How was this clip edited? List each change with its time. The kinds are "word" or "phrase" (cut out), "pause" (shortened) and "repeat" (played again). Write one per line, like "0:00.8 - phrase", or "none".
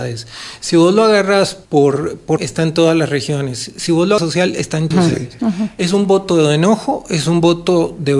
0:01.7 - pause
0:02.4 - word
0:04.2 - phrase
0:04.9 - phrase